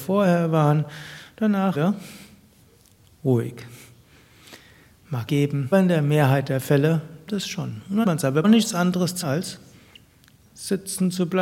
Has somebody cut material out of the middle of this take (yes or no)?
yes